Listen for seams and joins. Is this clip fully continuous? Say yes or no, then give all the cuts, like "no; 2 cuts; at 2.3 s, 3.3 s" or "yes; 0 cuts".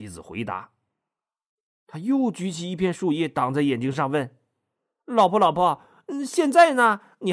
yes; 0 cuts